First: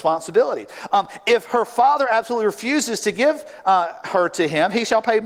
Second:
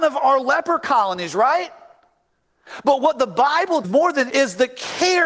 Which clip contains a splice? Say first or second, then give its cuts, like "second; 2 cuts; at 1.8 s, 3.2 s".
second; 2 cuts; at 3.8 s, 4.3 s